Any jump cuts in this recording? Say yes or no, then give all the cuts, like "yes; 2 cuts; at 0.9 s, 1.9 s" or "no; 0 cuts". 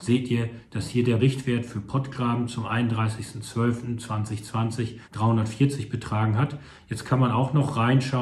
yes; 2 cuts; at 1.2 s, 5.0 s